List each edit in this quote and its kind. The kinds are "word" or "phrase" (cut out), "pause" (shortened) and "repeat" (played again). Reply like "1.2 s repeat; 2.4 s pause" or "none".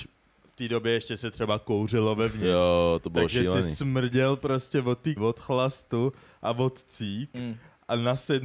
5.2 s word